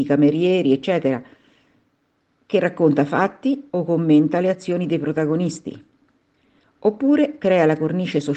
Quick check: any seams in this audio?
no; 0 cuts

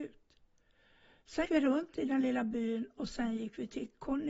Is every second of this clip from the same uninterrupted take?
no; 1 cut; at 1.4 s

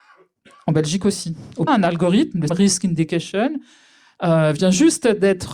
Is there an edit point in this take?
yes; 2 cuts; at 1.7 s, 2.5 s

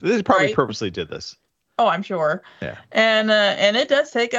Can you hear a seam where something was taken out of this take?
no; 0 cuts

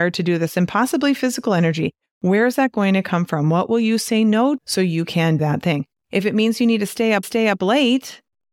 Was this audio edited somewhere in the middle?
yes; 3 cuts; at 4.6 s, 5.4 s, 7.2 s

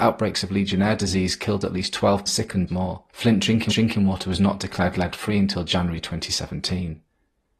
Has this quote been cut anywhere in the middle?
yes; 4 cuts; at 2.3 s, 2.7 s, 3.1 s, 3.7 s

